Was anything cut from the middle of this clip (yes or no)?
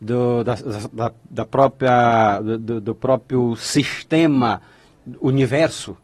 no